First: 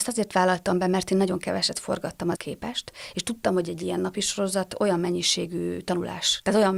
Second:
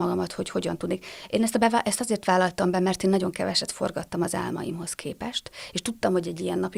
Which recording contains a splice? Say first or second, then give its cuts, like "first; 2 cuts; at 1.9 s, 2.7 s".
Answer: first; 1 cut; at 2.4 s